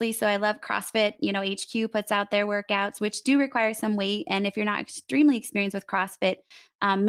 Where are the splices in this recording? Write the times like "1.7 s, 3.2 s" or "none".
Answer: none

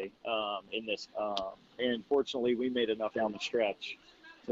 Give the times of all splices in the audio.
1.1 s, 3.1 s

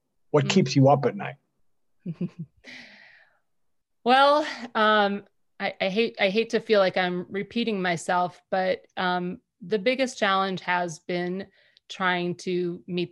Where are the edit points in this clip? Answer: none

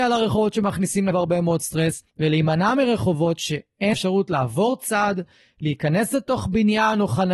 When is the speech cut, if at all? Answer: 1.1 s, 2.1 s, 3.9 s

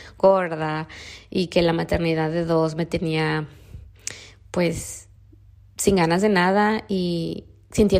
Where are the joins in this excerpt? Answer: none

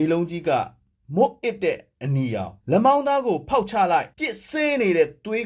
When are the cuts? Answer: 2.6 s, 4.1 s

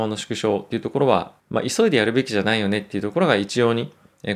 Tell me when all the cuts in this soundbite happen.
1.4 s

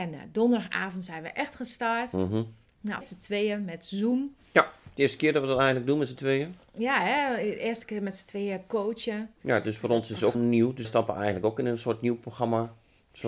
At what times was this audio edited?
3.0 s, 10.3 s, 10.8 s

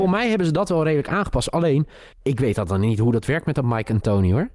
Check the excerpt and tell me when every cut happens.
2.1 s

